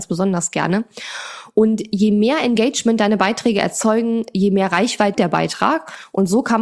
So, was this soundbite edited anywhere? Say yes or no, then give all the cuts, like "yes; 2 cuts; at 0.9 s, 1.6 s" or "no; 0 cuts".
yes; 1 cut; at 5.1 s